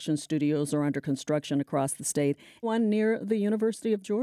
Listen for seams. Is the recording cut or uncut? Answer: cut